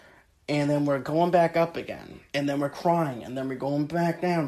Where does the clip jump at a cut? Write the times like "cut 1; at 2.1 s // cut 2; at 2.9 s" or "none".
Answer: cut 1; at 2.3 s